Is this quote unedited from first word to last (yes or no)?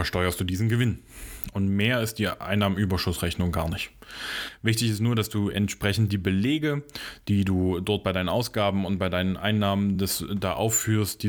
yes